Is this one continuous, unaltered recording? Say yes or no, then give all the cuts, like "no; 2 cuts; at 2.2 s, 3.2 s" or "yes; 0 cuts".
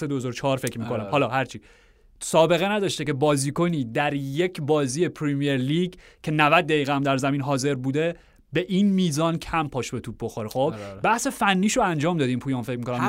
yes; 0 cuts